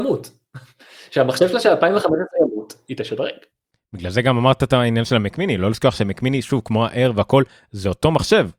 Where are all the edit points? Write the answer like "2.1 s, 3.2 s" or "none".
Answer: none